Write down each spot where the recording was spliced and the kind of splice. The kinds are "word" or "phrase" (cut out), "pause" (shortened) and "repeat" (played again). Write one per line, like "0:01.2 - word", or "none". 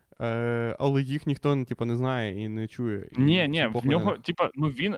none